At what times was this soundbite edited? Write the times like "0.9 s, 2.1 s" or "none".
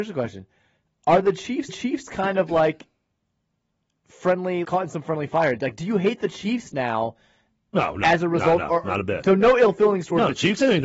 1.7 s, 4.6 s